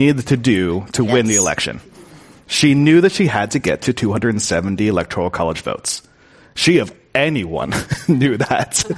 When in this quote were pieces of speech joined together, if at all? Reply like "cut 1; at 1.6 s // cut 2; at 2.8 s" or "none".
none